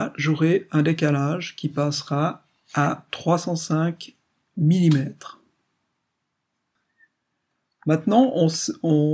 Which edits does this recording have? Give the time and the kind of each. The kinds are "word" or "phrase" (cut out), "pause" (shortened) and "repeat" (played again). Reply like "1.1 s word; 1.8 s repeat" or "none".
none